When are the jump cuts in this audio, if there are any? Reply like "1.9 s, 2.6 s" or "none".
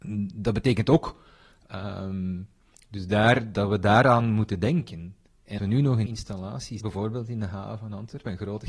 3.5 s, 5.6 s, 6.1 s, 6.8 s